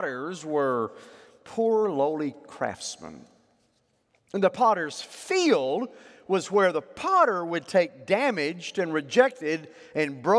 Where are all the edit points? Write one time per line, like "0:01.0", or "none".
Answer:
none